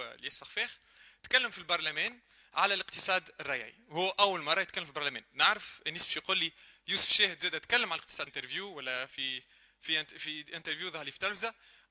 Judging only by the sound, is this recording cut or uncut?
cut